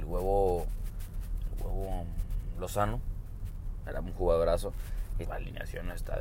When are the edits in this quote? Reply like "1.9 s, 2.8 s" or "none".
5.2 s